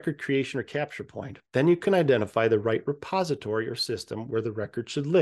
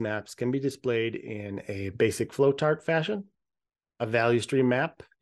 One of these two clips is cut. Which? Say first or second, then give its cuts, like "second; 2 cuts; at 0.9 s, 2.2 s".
first; 1 cut; at 1.5 s